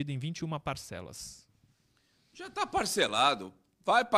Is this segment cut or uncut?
uncut